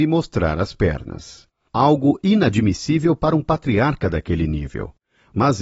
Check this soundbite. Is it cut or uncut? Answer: uncut